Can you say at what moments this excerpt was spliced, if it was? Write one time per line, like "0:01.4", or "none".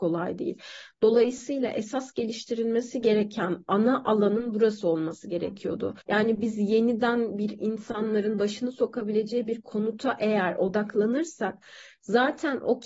0:06.0